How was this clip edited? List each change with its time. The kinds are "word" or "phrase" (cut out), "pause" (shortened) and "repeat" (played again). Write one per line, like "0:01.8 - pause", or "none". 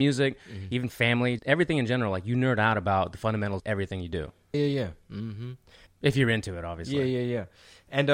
0:01.4 - word
0:03.6 - word
0:04.5 - word
0:05.9 - word